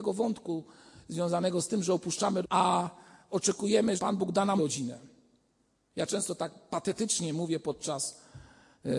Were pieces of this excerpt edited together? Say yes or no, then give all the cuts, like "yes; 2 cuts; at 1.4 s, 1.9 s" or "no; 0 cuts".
yes; 3 cuts; at 2.4 s, 4.0 s, 4.6 s